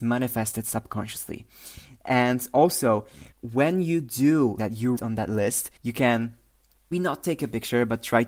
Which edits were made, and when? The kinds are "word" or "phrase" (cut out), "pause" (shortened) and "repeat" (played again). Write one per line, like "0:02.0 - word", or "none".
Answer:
0:03.3 - pause
0:04.6 - word
0:05.0 - word
0:05.8 - pause
0:06.9 - word